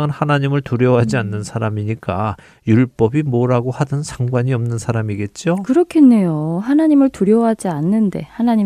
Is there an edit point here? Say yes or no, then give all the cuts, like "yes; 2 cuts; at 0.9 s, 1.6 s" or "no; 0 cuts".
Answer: no; 0 cuts